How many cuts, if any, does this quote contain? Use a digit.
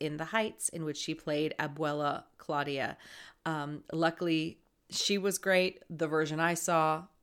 0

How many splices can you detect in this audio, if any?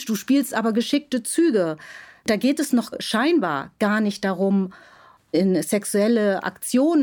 0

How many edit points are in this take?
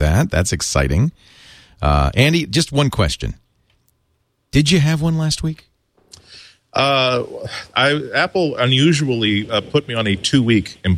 0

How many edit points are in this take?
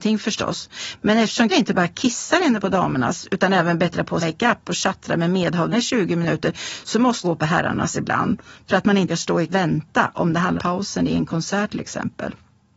7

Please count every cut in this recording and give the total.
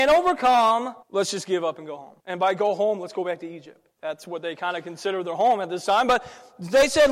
3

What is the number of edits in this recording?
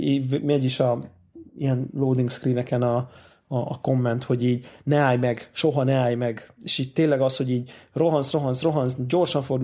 0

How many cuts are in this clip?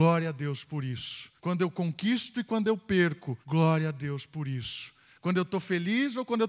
2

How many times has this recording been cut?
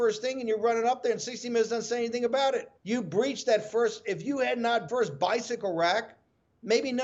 2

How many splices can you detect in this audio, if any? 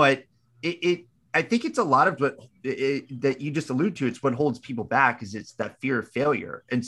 1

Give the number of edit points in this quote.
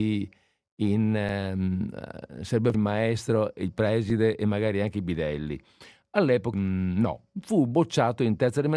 2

